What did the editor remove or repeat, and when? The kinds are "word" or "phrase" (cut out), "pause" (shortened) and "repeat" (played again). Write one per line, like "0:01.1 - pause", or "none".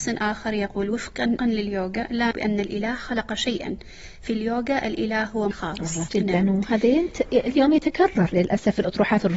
0:01.4 - word
0:02.3 - word
0:05.5 - phrase
0:06.1 - word